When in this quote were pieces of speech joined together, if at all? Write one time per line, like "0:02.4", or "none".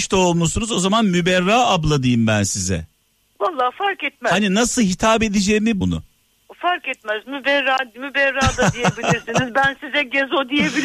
0:05.8